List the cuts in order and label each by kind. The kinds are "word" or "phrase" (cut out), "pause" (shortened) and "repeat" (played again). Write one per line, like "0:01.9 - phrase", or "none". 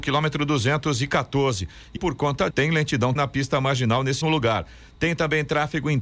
0:02.0 - word
0:02.5 - word
0:03.2 - word
0:04.2 - word